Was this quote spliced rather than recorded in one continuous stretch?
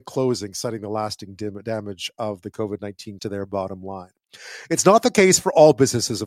yes; 1 cut; at 3.2 s

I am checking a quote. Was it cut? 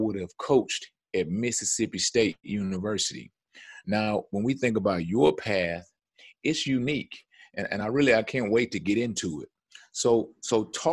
no; 0 cuts

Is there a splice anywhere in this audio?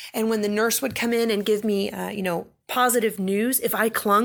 no; 0 cuts

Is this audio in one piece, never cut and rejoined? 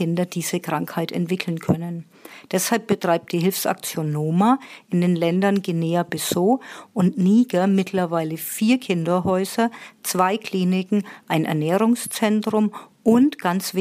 yes; 0 cuts

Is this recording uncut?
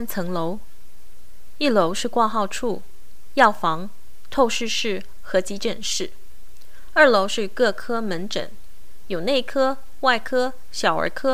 yes; 0 cuts

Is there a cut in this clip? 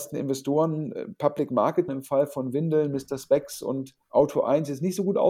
yes; 2 cuts; at 1.9 s, 4.0 s

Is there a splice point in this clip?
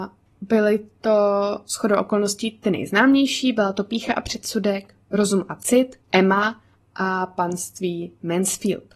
yes; 1 cut; at 6.0 s

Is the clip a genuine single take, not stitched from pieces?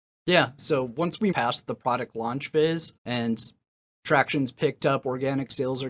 no; 2 cuts; at 1.3 s, 3.0 s

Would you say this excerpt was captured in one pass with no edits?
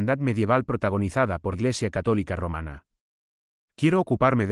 no; 1 cut; at 1.5 s

